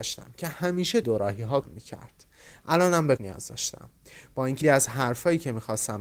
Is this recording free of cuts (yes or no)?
no